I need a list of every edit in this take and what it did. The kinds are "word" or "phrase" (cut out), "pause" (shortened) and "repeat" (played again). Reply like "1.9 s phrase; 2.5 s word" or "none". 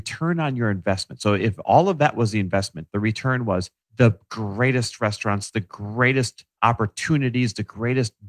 3.8 s pause

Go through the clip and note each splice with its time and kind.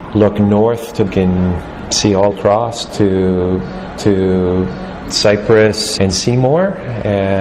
1.1 s phrase; 2.3 s phrase; 4.0 s repeat

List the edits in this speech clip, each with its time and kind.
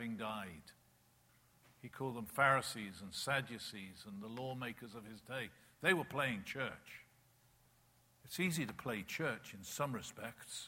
none

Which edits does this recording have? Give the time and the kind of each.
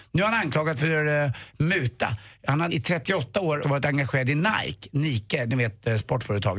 2.7 s word; 3.6 s word

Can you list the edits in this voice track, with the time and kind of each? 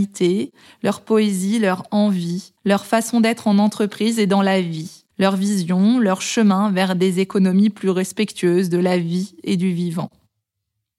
2.6 s pause; 5.1 s pause

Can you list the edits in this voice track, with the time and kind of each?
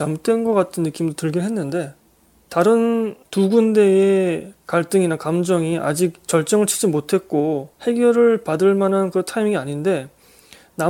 3.2 s pause; 7.7 s pause

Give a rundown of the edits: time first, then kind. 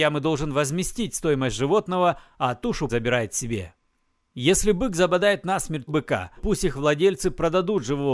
2.9 s word; 5.9 s word; 6.4 s word

